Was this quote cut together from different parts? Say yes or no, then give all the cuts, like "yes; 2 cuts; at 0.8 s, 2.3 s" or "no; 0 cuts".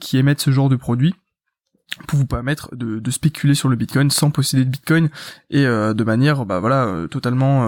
no; 0 cuts